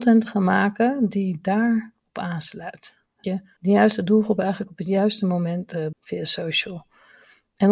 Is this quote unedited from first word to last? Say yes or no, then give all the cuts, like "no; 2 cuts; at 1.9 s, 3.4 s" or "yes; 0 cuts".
no; 3 cuts; at 3.2 s, 3.6 s, 5.9 s